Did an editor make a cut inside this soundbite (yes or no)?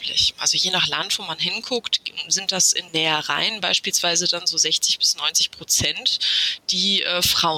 yes